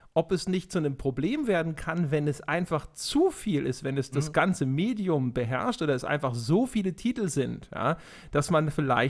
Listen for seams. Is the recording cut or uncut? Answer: uncut